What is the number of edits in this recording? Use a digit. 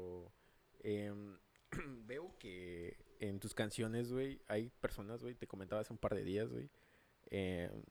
0